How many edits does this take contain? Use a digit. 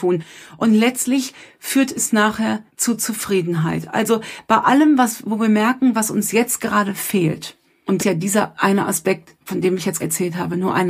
3